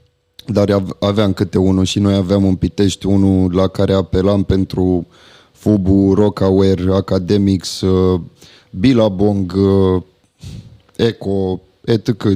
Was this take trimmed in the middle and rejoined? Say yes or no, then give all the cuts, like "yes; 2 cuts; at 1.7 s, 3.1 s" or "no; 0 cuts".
no; 0 cuts